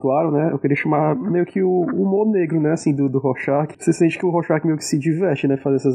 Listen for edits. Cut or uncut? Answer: cut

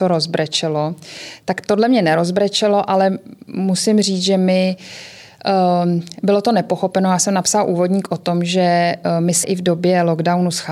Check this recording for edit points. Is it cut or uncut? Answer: cut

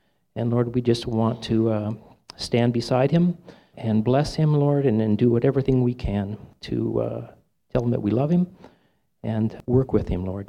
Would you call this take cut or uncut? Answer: uncut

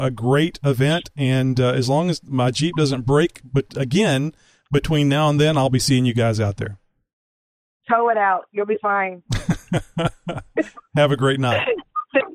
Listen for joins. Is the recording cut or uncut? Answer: uncut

